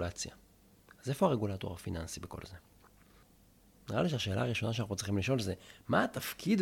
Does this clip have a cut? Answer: no; 0 cuts

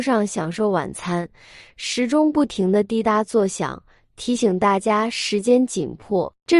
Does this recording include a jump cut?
no; 0 cuts

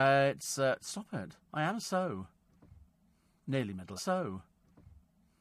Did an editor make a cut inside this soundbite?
yes; 2 cuts; at 1.4 s, 4.0 s

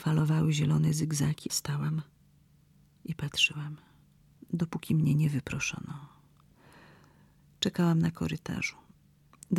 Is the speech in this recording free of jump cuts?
no; 2 cuts; at 1.5 s, 4.3 s

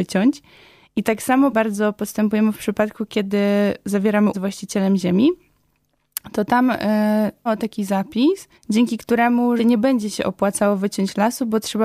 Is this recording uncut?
no; 5 cuts; at 1.5 s, 4.3 s, 7.5 s, 8.5 s, 9.6 s

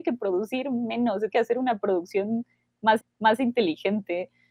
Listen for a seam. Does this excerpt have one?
yes; 2 cuts; at 1.3 s, 3.0 s

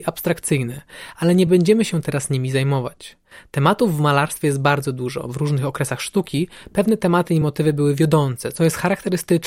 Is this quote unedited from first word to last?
yes; 0 cuts

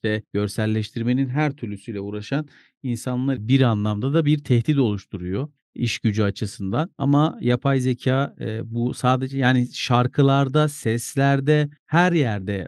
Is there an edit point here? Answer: yes; 1 cut; at 3.3 s

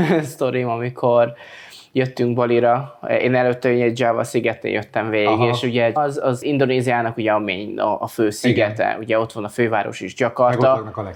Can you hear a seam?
yes; 1 cut; at 6.0 s

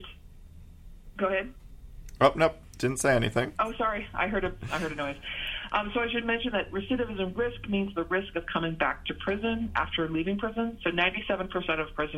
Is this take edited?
yes; 1 cut; at 3.5 s

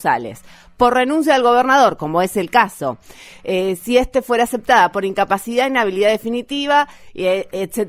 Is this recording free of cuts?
yes; 0 cuts

